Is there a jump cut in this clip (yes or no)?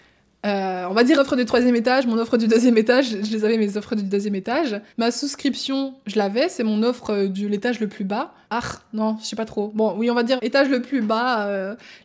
yes